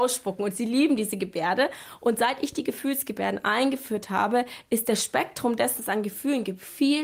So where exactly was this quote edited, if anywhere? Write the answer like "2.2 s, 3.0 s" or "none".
5.8 s